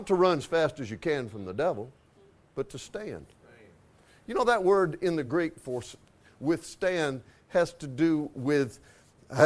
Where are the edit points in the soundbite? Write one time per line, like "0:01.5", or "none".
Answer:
none